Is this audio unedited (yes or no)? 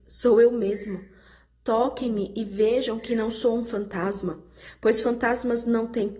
yes